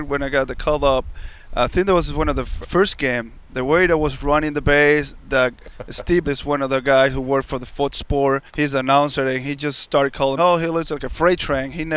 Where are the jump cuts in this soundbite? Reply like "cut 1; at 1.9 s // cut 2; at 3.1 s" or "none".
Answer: cut 1; at 2.6 s // cut 2; at 5.6 s // cut 3; at 6.2 s // cut 4; at 8.5 s // cut 5; at 10.4 s